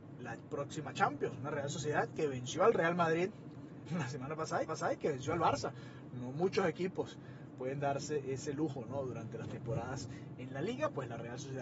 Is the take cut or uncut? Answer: cut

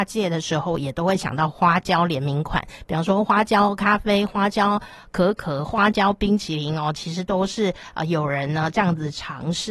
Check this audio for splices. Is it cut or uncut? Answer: uncut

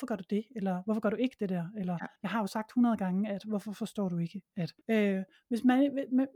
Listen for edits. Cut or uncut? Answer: cut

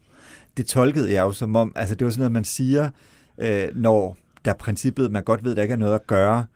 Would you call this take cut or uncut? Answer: uncut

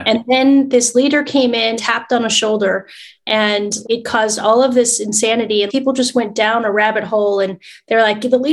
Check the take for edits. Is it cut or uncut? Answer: cut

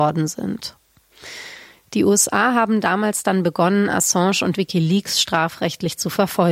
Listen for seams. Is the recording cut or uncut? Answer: uncut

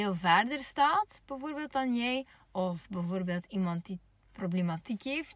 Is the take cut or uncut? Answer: uncut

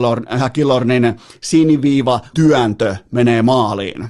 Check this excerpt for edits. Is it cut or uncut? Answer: cut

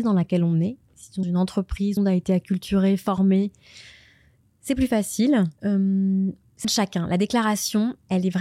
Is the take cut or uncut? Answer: cut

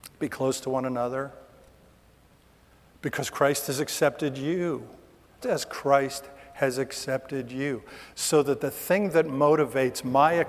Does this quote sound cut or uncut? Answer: cut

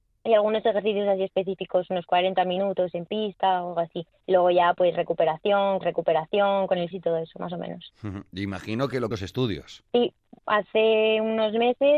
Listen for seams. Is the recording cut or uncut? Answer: cut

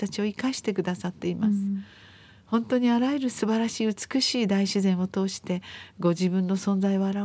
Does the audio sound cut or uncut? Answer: uncut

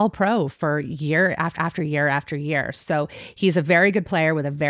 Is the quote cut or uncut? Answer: cut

